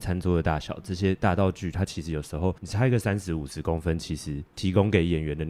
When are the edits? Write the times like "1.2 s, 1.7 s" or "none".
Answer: 2.6 s, 4.5 s